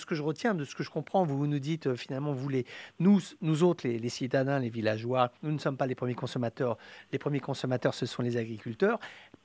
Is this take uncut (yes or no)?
no